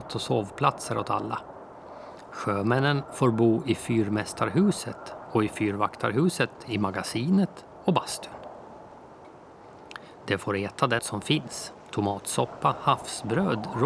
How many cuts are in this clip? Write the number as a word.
two